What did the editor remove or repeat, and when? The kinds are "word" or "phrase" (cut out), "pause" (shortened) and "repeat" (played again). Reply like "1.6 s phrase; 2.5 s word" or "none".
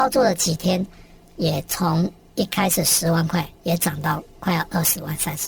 3.6 s pause